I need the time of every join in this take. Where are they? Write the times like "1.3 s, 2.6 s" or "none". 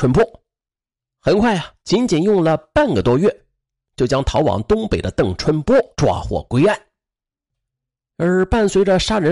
1.0 s, 1.8 s, 5.9 s